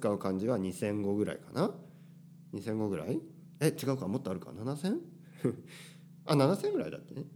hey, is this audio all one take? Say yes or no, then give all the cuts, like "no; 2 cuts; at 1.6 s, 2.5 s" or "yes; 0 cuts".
yes; 0 cuts